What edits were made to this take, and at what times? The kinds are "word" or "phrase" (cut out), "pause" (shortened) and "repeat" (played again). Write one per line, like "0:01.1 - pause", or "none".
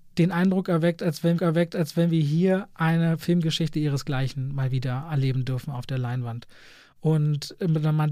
0:01.4 - repeat